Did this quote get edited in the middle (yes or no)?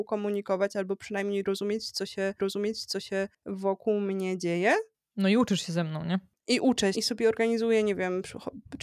yes